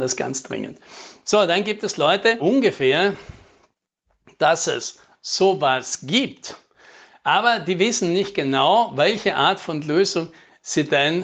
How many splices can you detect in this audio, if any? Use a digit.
1